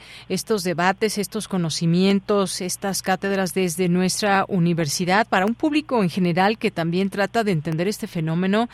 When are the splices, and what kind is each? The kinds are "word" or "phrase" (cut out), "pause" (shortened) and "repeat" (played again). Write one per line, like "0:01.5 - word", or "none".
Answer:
none